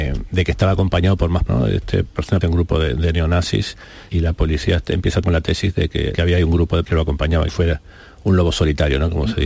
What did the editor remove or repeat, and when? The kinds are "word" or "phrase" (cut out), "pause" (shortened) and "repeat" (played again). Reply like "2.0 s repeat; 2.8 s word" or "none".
1.5 s word; 2.4 s word; 4.1 s word; 5.2 s word; 6.1 s word; 6.8 s word; 7.5 s word